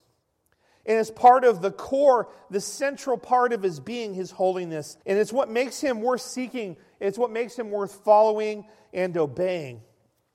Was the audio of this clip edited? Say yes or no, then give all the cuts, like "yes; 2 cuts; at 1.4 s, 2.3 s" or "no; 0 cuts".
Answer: yes; 1 cut; at 5.0 s